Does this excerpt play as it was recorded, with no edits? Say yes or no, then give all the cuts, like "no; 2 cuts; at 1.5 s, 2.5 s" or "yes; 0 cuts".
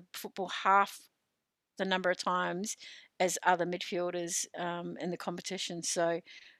yes; 0 cuts